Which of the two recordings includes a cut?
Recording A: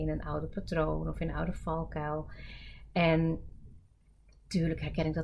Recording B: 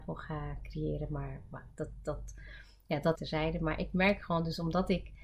B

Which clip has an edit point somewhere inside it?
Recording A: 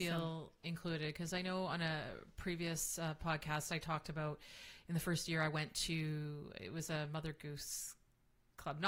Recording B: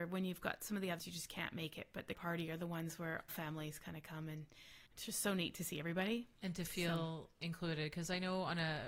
B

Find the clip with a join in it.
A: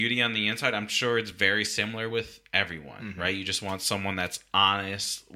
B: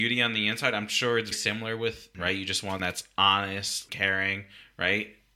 B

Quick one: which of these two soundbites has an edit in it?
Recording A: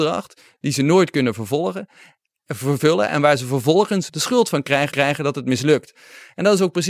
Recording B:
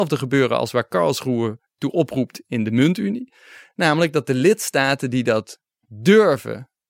A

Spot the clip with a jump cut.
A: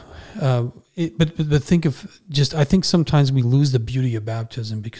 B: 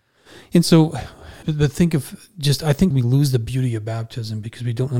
B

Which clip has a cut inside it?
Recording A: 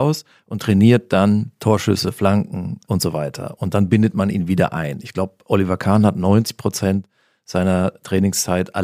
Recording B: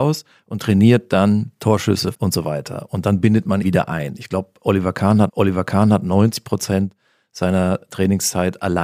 B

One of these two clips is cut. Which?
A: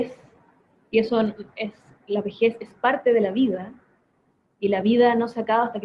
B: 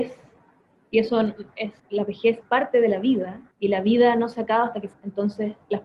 B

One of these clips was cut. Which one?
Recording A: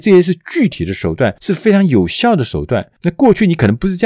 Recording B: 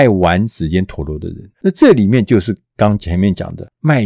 B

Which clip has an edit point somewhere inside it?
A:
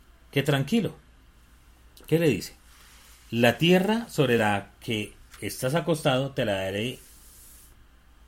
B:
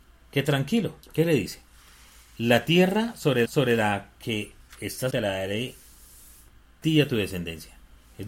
B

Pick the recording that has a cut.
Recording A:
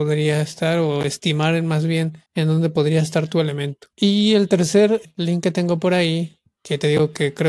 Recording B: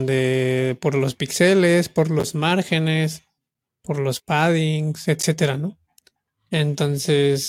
A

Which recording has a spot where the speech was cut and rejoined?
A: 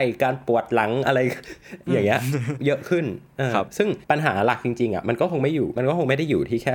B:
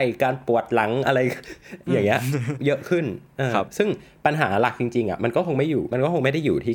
A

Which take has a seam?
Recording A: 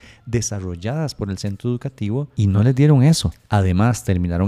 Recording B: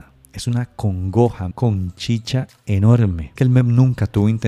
B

